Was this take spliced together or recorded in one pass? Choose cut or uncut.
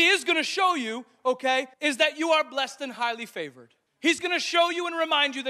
cut